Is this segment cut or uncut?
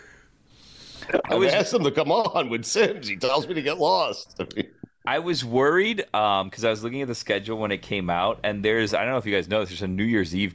uncut